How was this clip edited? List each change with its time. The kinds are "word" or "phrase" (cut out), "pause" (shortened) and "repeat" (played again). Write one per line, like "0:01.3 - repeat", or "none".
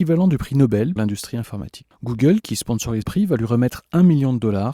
0:01.0 - word
0:03.0 - word